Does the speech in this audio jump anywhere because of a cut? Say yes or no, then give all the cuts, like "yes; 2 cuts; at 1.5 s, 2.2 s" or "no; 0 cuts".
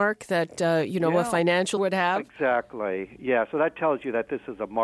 yes; 1 cut; at 1.8 s